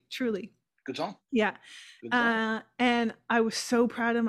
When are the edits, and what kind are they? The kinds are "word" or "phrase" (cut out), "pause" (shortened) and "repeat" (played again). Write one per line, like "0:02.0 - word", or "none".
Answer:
none